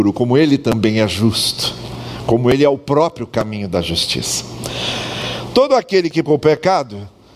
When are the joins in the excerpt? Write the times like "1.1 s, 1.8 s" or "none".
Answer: 6.2 s